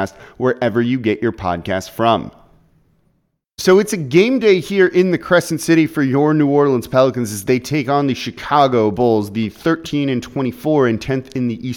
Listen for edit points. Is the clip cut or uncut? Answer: uncut